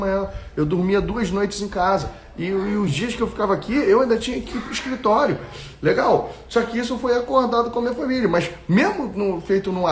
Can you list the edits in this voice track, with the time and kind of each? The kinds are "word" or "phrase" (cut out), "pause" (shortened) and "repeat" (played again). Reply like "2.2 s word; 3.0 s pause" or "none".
none